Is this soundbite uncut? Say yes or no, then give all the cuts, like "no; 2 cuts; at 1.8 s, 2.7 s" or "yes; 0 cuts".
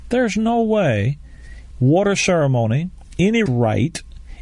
no; 2 cuts; at 1.7 s, 3.5 s